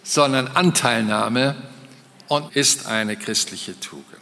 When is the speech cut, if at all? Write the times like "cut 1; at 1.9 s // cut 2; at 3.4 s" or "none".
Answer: cut 1; at 2.5 s